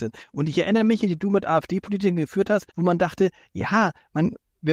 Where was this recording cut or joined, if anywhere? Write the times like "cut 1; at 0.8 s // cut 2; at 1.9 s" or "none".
cut 1; at 1.0 s // cut 2; at 2.7 s

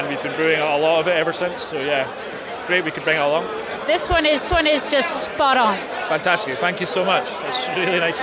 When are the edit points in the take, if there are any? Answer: cut 1; at 4.5 s

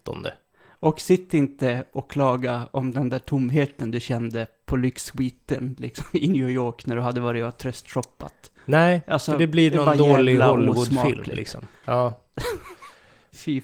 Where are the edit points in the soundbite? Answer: none

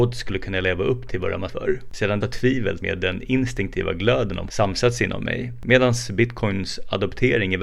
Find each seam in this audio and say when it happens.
cut 1; at 1.5 s // cut 2; at 2.2 s // cut 3; at 2.8 s // cut 4; at 4.5 s

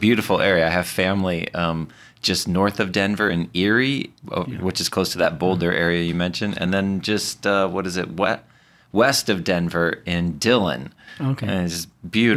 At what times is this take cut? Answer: none

